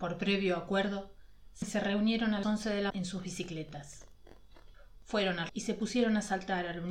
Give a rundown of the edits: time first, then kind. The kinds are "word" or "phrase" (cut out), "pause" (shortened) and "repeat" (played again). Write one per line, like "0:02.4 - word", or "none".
0:01.6 - word
0:02.4 - word
0:02.9 - word
0:05.5 - word